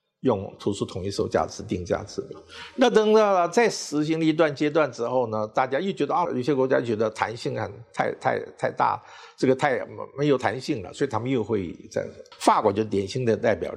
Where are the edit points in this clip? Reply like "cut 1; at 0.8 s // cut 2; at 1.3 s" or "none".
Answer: cut 1; at 6.2 s